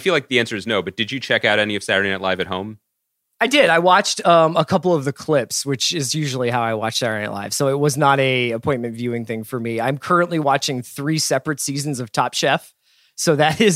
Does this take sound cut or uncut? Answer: uncut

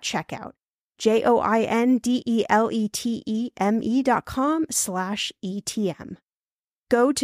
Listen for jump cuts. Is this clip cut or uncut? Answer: uncut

